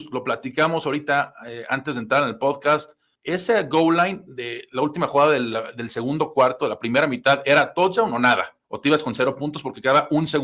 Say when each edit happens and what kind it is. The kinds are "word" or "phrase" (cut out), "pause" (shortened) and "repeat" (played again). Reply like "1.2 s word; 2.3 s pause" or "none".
3.1 s pause; 8.6 s pause